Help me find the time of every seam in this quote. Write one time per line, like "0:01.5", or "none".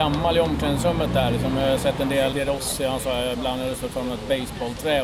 0:02.3